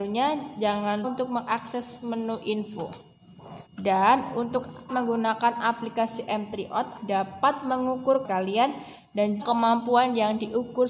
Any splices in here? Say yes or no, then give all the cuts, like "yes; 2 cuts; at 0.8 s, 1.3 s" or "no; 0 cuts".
yes; 6 cuts; at 1.0 s, 3.7 s, 4.9 s, 7.0 s, 8.2 s, 9.4 s